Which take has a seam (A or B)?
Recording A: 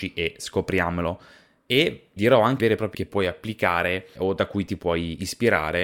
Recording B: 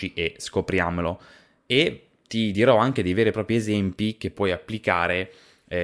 A